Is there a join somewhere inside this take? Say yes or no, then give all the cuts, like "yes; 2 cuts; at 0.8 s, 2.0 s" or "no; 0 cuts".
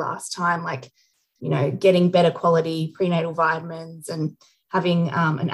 no; 0 cuts